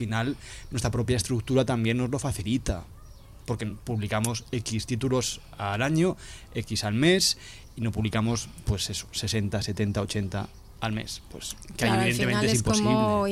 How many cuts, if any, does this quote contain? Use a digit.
0